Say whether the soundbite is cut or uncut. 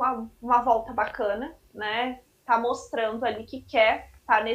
uncut